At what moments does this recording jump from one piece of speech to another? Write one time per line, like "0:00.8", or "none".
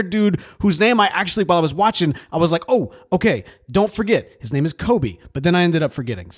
none